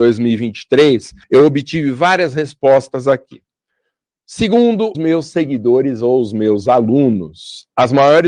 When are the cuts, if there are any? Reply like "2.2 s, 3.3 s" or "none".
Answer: 1.2 s, 4.9 s